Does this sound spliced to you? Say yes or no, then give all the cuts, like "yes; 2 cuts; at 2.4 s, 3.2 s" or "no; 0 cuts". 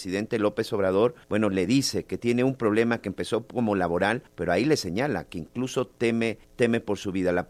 yes; 3 cuts; at 1.2 s, 4.3 s, 6.4 s